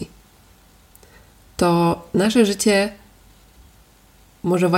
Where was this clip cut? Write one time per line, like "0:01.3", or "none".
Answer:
none